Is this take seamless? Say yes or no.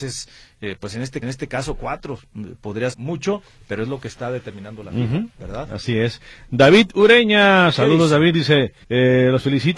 no